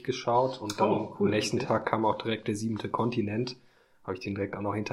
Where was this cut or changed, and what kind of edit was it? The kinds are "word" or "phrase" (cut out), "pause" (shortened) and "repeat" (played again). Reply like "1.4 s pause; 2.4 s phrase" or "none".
none